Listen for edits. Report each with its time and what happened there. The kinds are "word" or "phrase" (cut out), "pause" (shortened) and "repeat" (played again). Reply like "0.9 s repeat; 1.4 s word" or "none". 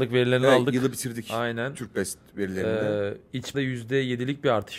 3.5 s word